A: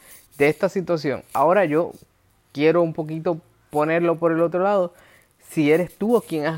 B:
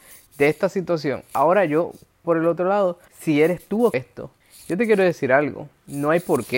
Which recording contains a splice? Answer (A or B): B